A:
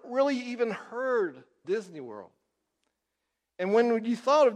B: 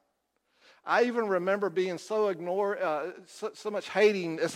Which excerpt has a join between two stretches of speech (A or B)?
A